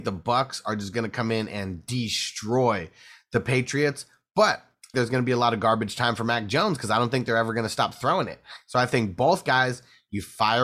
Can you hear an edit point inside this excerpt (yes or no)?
yes